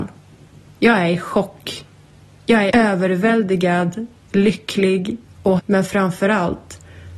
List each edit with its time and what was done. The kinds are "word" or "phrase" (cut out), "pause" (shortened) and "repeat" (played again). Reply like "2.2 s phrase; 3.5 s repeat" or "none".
2.7 s word; 5.6 s word